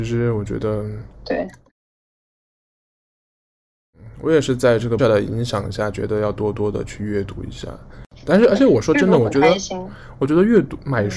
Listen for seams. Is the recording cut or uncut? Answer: cut